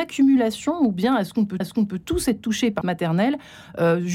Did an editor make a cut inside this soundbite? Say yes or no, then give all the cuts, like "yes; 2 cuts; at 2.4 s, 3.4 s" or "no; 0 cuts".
yes; 2 cuts; at 1.6 s, 2.8 s